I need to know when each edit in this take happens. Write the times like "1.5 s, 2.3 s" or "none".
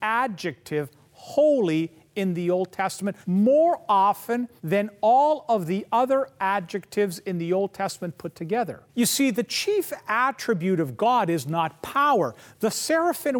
3.2 s, 4.6 s, 8.9 s